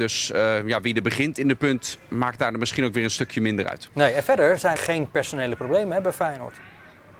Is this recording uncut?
no; 1 cut; at 4.8 s

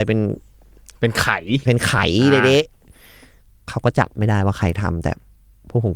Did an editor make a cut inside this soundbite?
no; 0 cuts

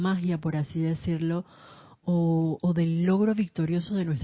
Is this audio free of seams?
yes; 0 cuts

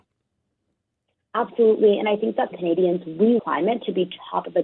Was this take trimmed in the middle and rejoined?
yes; 2 cuts; at 2.5 s, 3.4 s

